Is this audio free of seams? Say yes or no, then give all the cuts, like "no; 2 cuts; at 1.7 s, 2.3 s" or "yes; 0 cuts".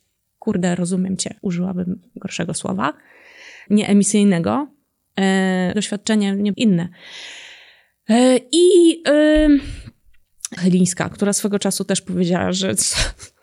no; 5 cuts; at 1.4 s, 3.7 s, 5.7 s, 6.5 s, 10.6 s